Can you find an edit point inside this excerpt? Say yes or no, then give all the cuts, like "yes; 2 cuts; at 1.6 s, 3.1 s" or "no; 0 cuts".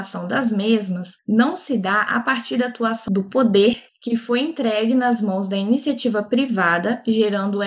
yes; 2 cuts; at 1.2 s, 3.9 s